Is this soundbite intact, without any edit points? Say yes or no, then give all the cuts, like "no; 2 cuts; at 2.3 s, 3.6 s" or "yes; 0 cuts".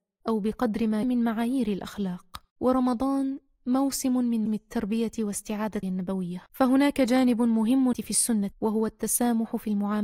no; 7 cuts; at 1.0 s, 2.5 s, 4.5 s, 5.8 s, 6.5 s, 7.9 s, 8.5 s